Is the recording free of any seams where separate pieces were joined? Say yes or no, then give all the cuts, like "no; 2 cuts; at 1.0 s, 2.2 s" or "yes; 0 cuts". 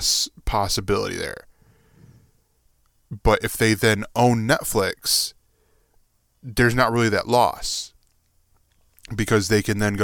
yes; 0 cuts